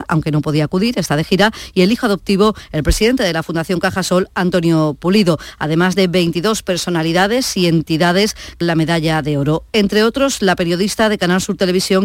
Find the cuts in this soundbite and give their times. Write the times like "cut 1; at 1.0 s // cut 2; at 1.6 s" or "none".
cut 1; at 8.6 s